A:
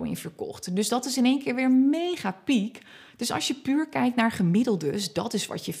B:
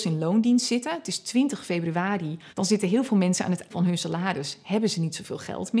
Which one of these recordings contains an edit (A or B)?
B